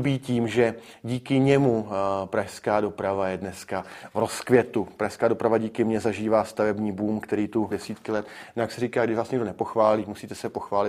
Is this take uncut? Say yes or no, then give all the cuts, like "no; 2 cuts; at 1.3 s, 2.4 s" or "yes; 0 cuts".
no; 1 cut; at 7.7 s